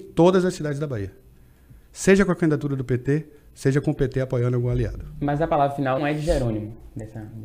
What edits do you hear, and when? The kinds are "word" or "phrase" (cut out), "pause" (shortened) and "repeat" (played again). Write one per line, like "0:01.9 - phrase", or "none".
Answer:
0:06.0 - word